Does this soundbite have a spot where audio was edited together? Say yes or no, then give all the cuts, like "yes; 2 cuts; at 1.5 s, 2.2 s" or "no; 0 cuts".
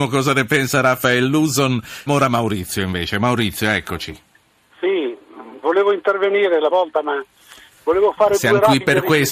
yes; 2 cuts; at 2.1 s, 6.7 s